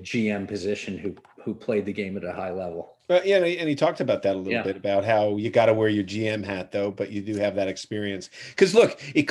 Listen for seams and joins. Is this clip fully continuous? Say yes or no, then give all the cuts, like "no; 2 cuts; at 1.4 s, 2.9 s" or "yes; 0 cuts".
yes; 0 cuts